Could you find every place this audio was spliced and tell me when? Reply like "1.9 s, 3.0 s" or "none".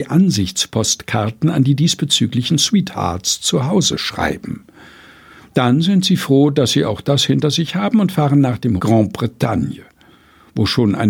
8.8 s